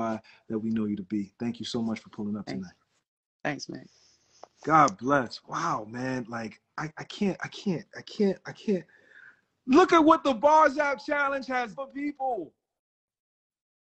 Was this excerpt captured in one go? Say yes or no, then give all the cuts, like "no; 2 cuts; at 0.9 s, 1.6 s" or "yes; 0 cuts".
no; 2 cuts; at 6.7 s, 11.7 s